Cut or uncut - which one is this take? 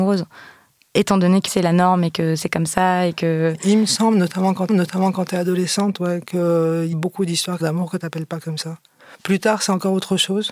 cut